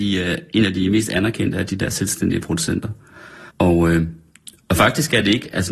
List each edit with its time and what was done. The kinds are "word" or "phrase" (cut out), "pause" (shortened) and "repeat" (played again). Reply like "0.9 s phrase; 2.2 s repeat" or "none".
3.5 s pause